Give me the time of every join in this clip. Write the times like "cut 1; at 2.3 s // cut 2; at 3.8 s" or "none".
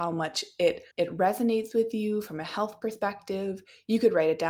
cut 1; at 0.9 s